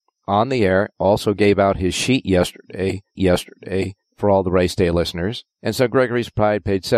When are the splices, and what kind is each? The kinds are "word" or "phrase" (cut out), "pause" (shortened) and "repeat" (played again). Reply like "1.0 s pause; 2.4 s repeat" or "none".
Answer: 3.2 s repeat; 5.5 s pause